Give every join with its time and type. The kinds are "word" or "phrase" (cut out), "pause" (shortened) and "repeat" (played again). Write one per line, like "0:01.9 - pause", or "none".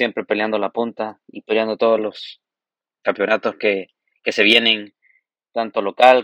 none